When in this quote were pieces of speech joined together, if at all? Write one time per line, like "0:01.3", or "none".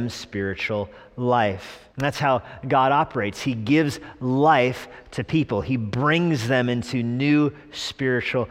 0:01.9